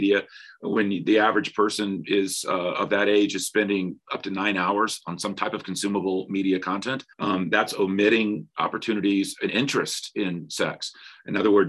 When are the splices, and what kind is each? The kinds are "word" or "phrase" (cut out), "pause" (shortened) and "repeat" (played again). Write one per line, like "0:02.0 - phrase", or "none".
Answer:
0:07.1 - pause
0:09.5 - word